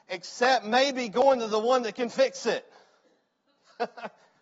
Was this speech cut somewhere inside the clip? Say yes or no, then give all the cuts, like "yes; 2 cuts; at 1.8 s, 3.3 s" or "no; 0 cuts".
no; 0 cuts